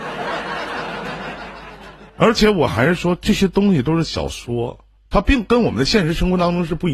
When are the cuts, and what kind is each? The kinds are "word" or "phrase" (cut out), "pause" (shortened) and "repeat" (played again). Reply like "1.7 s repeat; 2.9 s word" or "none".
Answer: 2.1 s pause; 5.0 s pause